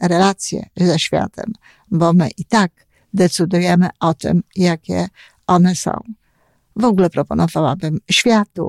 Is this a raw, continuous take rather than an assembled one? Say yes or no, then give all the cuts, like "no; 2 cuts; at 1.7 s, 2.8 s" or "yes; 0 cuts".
yes; 0 cuts